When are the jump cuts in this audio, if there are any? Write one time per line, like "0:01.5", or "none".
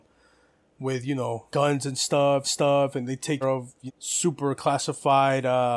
0:01.5
0:02.4
0:03.4
0:03.9